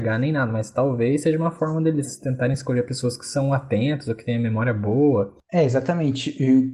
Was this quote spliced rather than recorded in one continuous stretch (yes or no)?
no